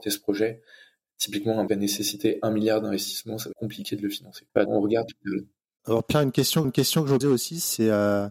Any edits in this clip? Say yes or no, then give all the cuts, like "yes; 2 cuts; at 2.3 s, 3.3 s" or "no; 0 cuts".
yes; 6 cuts; at 1.7 s, 3.5 s, 4.7 s, 5.1 s, 6.6 s, 7.2 s